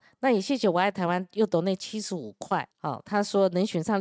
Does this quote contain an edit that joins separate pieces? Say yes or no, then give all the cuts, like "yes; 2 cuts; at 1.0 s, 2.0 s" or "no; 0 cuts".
yes; 1 cut; at 2.7 s